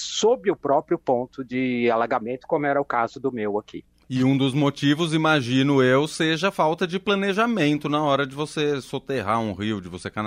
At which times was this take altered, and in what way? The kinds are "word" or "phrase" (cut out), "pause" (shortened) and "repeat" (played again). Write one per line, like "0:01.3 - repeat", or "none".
none